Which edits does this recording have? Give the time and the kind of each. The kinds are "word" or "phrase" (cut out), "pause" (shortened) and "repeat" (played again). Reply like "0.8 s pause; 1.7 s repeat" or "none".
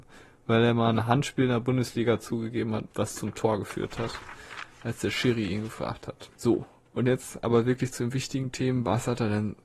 2.9 s pause; 6.3 s pause